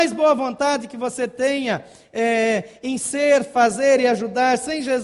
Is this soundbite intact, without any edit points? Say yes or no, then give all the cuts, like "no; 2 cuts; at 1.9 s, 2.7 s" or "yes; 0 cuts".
yes; 0 cuts